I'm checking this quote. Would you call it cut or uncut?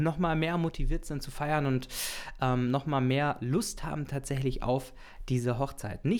uncut